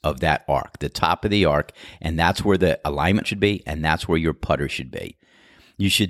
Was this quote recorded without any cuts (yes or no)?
no